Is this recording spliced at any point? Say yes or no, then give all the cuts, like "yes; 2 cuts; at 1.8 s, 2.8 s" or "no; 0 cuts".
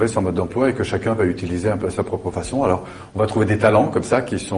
no; 0 cuts